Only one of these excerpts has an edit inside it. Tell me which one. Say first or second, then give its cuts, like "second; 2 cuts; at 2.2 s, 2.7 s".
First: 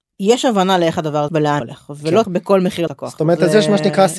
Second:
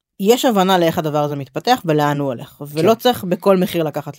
first; 4 cuts; at 1.3 s, 1.6 s, 2.2 s, 2.9 s